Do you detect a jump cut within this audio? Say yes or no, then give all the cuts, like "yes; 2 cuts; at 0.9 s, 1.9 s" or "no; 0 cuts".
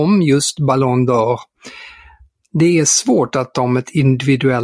yes; 1 cut; at 3.5 s